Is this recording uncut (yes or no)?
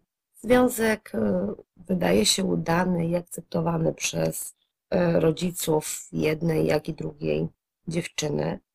yes